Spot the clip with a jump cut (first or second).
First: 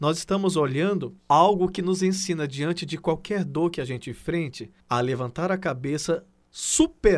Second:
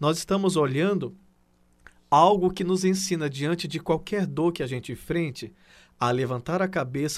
first